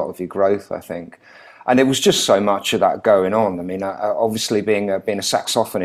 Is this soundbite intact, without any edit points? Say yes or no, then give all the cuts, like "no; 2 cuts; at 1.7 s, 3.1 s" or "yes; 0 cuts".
yes; 0 cuts